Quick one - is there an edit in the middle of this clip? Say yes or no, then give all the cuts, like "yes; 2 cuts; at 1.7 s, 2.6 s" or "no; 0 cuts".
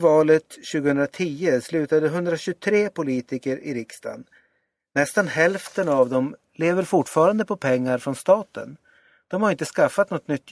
no; 0 cuts